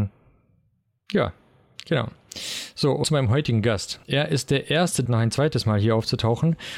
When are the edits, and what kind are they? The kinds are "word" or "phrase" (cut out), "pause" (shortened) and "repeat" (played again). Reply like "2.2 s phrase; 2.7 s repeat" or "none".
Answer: 3.0 s word; 4.0 s pause; 5.1 s phrase